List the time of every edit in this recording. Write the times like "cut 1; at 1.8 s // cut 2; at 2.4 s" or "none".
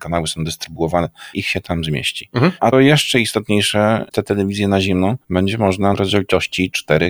cut 1; at 1.3 s // cut 2; at 2.7 s // cut 3; at 4.1 s // cut 4; at 5.9 s